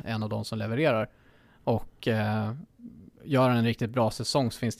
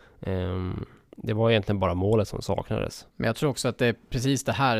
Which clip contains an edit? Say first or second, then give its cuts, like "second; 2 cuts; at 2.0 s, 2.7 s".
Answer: second; 1 cut; at 3.1 s